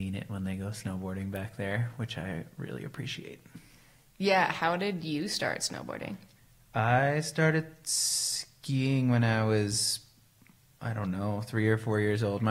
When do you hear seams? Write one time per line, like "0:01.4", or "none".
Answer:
none